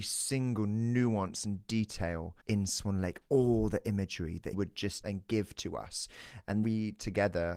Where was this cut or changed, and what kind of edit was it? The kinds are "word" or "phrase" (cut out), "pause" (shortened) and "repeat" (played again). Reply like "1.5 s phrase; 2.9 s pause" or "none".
2.4 s pause; 4.5 s word; 5.0 s phrase; 6.6 s word